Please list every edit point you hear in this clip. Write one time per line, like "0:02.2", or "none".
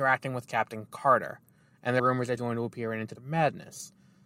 0:02.0
0:02.4
0:03.1